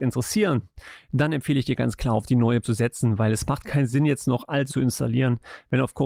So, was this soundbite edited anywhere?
yes; 2 cuts; at 2.6 s, 4.7 s

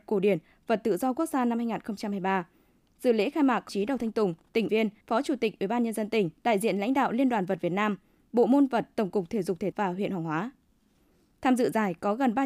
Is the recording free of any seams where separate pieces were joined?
no; 5 cuts; at 3.7 s, 4.7 s, 5.0 s, 6.4 s, 9.7 s

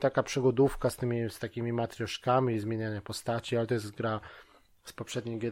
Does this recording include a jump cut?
no; 0 cuts

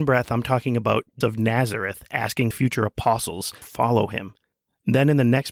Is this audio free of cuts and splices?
no; 3 cuts; at 1.2 s, 2.5 s, 3.6 s

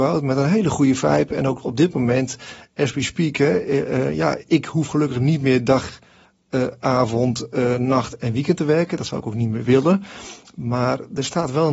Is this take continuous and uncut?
yes; 0 cuts

